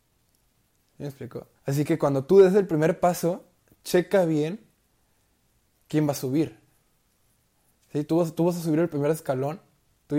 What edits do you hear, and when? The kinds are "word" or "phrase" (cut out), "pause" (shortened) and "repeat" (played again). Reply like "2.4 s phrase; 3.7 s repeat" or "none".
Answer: 1.6 s pause

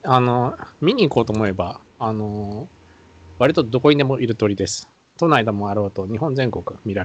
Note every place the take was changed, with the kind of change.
none

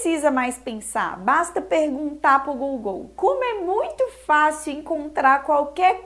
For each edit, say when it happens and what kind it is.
none

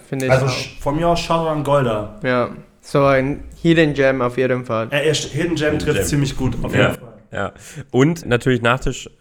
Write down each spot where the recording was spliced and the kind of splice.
8.2 s word

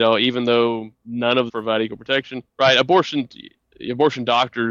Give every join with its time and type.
1.5 s word; 2.5 s pause

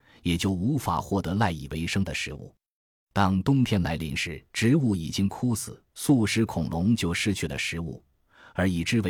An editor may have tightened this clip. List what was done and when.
4.5 s pause; 5.9 s pause

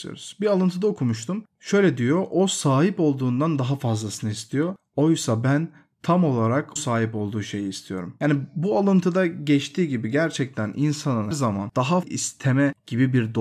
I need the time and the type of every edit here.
6.8 s word; 11.3 s word; 12.0 s word

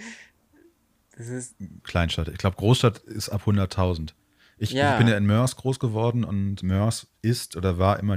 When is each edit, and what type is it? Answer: 1.8 s word

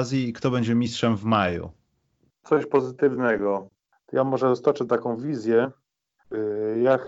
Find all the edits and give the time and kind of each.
none

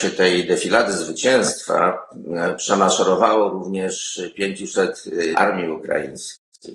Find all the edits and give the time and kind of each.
5.3 s word

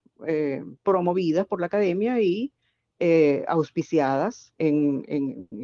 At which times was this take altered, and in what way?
4.6 s word

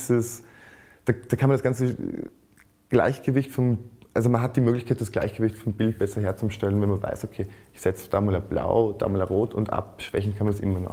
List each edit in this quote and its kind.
none

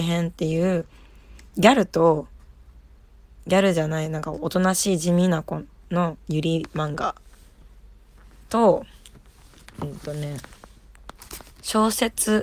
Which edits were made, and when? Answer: 11.5 s pause

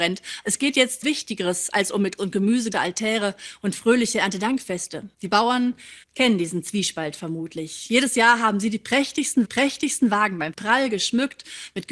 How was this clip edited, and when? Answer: 1.0 s word; 2.2 s word; 2.7 s word; 5.1 s pause; 6.0 s pause; 9.4 s repeat; 10.5 s word

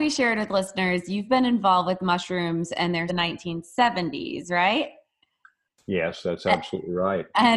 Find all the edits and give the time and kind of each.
3.1 s phrase

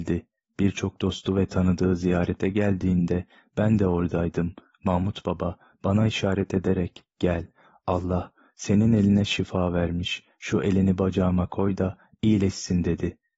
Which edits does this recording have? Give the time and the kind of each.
none

